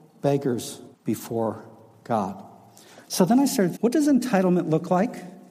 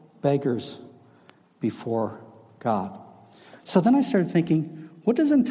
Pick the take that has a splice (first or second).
first